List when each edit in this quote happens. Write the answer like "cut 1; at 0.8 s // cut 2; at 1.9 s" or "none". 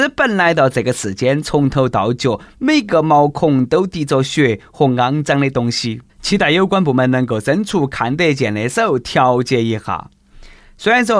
cut 1; at 6.1 s